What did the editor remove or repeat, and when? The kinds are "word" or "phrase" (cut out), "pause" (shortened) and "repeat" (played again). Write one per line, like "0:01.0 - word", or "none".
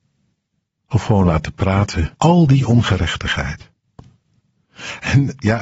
0:02.1 - pause

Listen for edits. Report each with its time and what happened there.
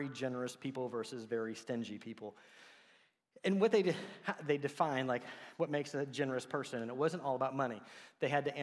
none

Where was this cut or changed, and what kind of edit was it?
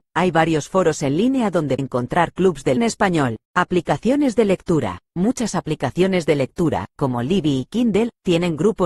0:01.8 - word
0:02.8 - word
0:03.4 - pause

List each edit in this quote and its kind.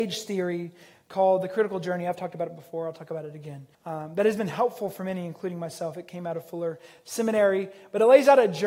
0:03.7 - pause

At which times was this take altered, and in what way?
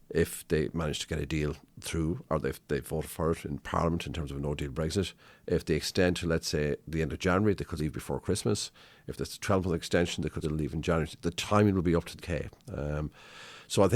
0:02.3 - word
0:07.8 - word
0:10.4 - word
0:12.2 - word

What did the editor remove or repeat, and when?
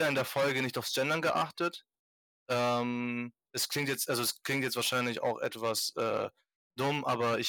none

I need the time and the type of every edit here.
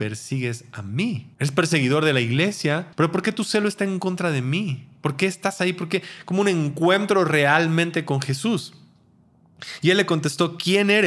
0:01.3 - pause
0:02.9 - pause

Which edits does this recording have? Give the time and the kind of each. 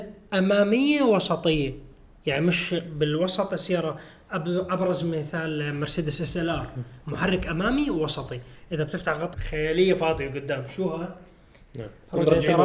0:09.3 - phrase

